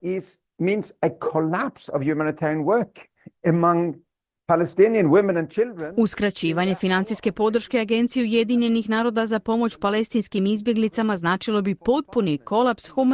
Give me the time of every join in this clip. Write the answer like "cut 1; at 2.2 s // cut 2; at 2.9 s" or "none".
cut 1; at 3.4 s